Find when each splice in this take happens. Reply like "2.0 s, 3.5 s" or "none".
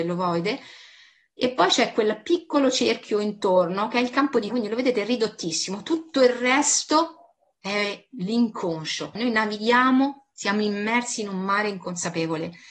4.5 s, 9.2 s